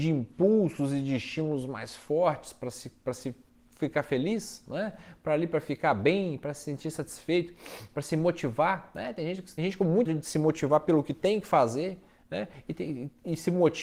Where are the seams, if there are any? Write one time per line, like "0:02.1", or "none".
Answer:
0:09.6
0:10.1